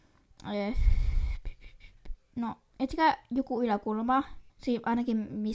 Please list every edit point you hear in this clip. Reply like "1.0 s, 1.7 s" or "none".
4.5 s

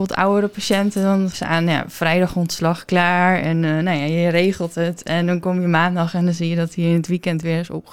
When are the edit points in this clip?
1.3 s

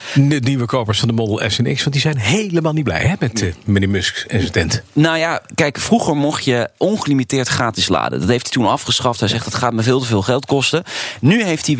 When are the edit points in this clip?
none

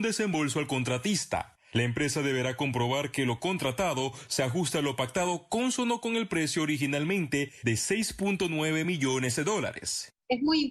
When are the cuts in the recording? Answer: none

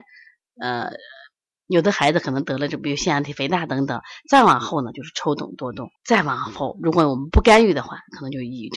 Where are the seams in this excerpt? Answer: 6.0 s

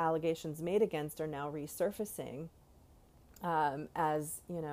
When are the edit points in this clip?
none

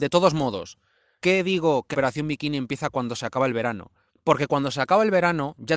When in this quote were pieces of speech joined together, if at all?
1.2 s, 1.9 s, 4.1 s

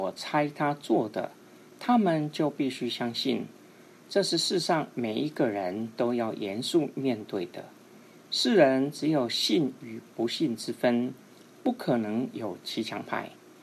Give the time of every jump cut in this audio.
none

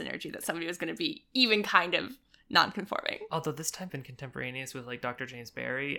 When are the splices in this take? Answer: 3.9 s

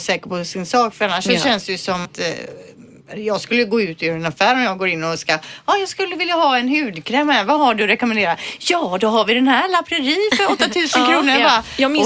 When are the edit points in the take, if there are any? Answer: 2.0 s

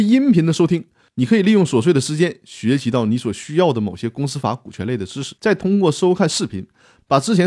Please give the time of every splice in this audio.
5.4 s

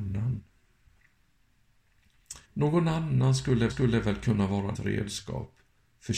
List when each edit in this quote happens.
2.4 s, 3.7 s, 4.7 s

